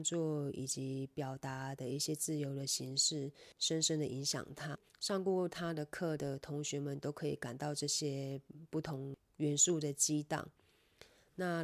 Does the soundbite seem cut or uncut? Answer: cut